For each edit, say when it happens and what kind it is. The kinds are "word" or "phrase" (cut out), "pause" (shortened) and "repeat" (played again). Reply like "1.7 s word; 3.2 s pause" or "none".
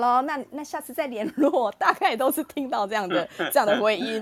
none